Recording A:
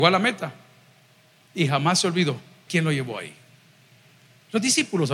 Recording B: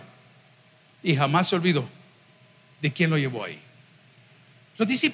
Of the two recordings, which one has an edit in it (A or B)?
A